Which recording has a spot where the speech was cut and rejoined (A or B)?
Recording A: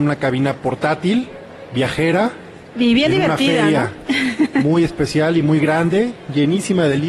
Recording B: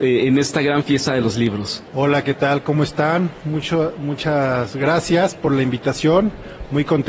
B